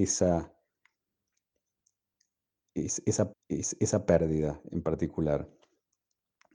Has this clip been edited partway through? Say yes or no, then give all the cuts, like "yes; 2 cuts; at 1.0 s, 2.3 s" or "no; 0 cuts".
yes; 1 cut; at 3.3 s